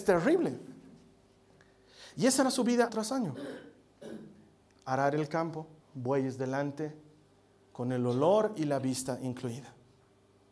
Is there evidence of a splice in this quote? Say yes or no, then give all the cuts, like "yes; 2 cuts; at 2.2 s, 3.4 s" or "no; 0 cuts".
yes; 2 cuts; at 2.9 s, 5.8 s